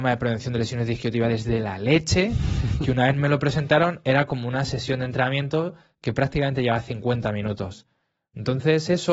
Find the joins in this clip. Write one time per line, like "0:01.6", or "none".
none